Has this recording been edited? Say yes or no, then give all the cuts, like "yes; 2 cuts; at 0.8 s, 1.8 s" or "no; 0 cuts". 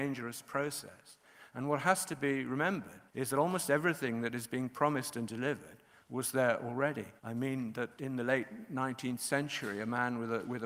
yes; 3 cuts; at 3.1 s, 7.2 s, 8.0 s